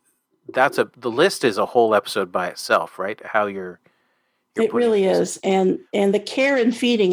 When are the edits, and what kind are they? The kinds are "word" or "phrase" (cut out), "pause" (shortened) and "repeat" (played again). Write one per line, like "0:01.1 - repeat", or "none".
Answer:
none